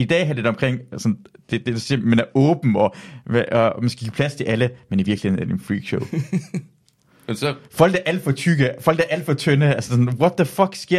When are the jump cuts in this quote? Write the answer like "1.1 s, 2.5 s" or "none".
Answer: none